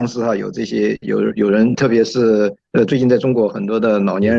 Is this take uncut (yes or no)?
no